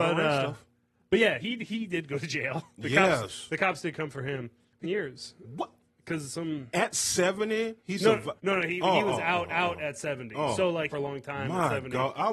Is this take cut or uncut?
cut